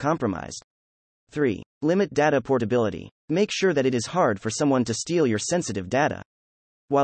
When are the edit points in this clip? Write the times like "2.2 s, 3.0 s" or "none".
none